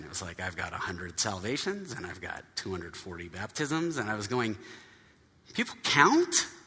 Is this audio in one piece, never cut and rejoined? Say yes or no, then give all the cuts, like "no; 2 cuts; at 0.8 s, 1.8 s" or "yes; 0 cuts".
yes; 0 cuts